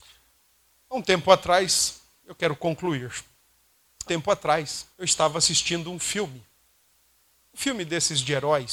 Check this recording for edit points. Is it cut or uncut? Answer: cut